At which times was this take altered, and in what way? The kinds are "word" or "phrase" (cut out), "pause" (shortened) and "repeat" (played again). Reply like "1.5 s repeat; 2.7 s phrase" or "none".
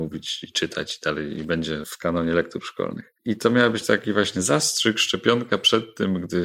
none